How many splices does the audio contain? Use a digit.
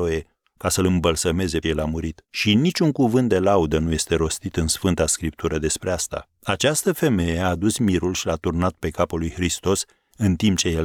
3